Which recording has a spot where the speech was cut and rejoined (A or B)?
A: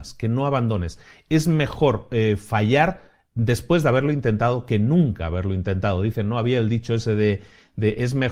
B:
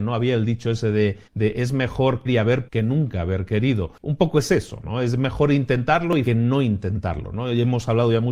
B